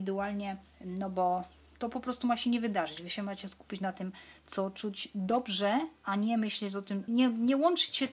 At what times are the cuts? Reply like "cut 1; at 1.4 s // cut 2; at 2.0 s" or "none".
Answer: cut 1; at 7.1 s

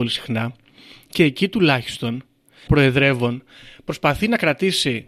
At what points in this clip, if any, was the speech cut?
cut 1; at 2.7 s

